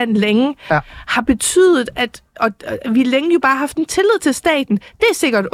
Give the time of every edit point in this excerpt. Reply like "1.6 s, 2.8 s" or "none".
none